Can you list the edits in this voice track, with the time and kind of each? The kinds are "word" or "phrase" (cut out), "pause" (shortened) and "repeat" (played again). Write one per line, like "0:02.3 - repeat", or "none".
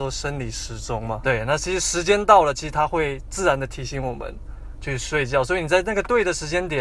0:01.2 - word